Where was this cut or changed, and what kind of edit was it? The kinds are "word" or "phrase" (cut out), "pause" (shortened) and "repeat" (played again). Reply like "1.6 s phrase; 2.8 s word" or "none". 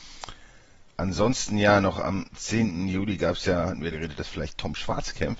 3.9 s word